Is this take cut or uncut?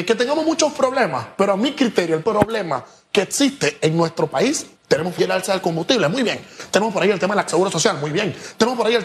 cut